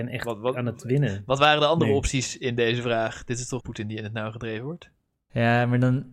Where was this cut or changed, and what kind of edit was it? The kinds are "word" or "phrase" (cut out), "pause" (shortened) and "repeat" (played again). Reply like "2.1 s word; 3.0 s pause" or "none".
3.6 s word